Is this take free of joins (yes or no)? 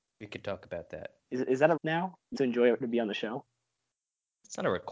no